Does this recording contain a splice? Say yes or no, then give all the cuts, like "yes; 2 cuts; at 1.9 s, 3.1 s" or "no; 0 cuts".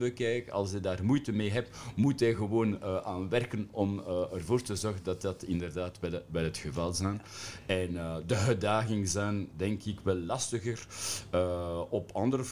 no; 0 cuts